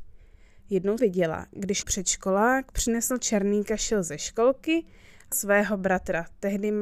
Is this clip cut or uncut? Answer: cut